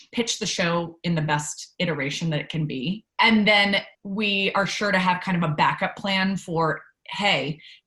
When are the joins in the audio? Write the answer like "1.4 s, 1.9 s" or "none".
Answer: 3.1 s, 3.9 s